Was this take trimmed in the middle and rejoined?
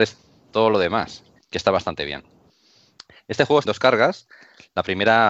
yes; 2 cuts; at 1.4 s, 3.6 s

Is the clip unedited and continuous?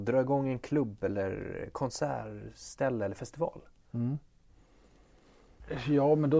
yes; 0 cuts

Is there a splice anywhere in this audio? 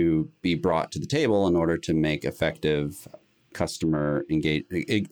no; 0 cuts

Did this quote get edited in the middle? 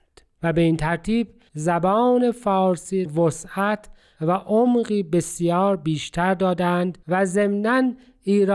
yes; 2 cuts; at 3.1 s, 7.0 s

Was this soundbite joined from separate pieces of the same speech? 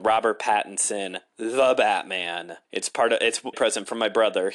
yes; 2 cuts; at 2.6 s, 3.5 s

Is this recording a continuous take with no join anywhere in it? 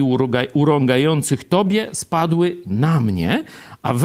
yes; 0 cuts

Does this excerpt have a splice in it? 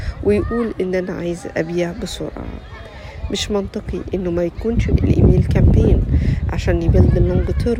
yes; 1 cut; at 4.9 s

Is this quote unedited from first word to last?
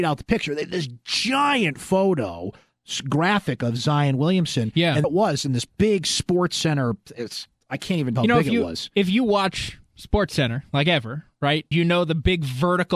no; 3 cuts; at 5.0 s, 8.1 s, 11.7 s

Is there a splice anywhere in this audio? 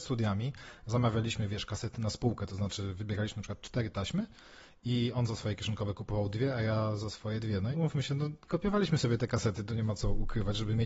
yes; 1 cut; at 7.7 s

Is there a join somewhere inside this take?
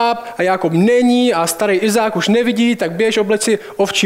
no; 0 cuts

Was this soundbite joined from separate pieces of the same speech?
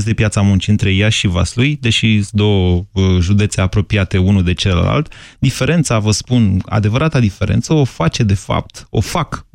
no; 0 cuts

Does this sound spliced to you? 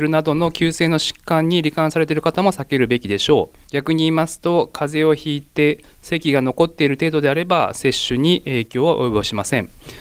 yes; 1 cut; at 3.6 s

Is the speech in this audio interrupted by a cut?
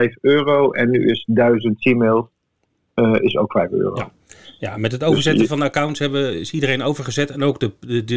no; 0 cuts

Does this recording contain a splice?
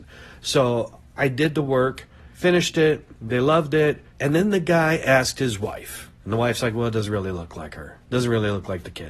yes; 4 cuts; at 2.3 s, 3.2 s, 4.1 s, 8.0 s

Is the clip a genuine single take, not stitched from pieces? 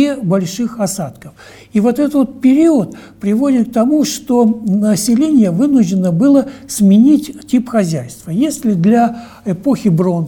yes; 0 cuts

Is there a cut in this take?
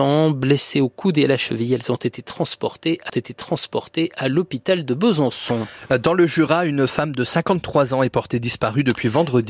yes; 1 cut; at 3.1 s

